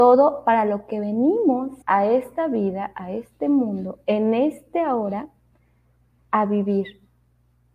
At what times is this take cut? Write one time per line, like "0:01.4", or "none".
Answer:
0:01.8